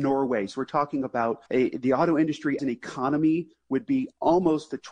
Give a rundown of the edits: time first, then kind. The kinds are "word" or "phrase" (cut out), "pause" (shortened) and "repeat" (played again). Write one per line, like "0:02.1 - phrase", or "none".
0:01.5 - pause
0:02.6 - word